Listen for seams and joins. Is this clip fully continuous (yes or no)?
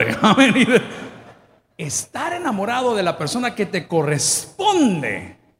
yes